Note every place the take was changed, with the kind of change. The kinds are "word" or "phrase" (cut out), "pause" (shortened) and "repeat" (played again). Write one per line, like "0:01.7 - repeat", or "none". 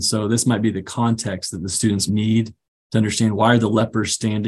0:02.1 - word